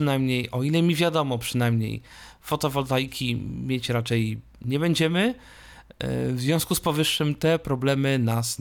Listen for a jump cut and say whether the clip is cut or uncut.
uncut